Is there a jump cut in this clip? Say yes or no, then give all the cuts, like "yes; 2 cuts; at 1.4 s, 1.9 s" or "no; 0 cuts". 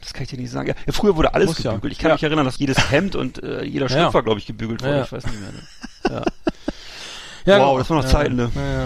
yes; 1 cut; at 2.6 s